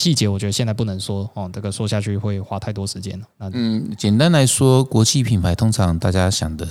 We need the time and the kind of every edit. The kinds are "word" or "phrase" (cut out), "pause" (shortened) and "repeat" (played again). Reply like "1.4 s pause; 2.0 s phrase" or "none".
3.3 s pause